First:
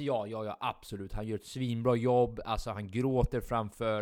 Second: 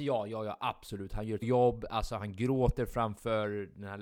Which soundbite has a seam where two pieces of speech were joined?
second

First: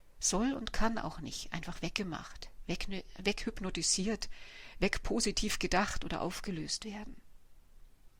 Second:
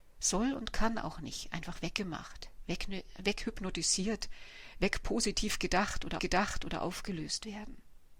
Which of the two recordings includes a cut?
second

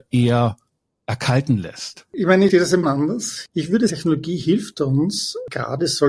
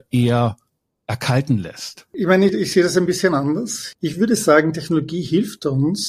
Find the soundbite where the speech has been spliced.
first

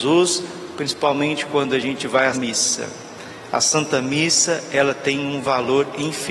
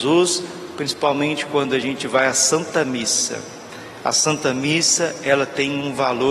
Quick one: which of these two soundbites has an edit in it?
first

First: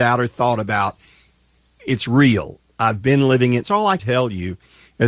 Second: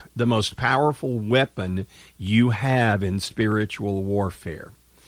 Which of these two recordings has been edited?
first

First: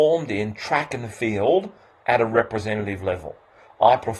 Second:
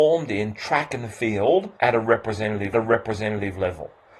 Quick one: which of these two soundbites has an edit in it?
second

